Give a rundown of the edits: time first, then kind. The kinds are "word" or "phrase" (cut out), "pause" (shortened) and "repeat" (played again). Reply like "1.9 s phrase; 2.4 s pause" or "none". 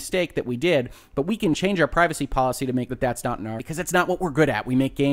2.9 s word; 3.6 s word